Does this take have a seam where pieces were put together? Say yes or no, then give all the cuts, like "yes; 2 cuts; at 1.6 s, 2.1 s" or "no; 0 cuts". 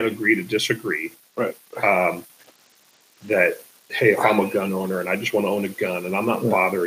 no; 0 cuts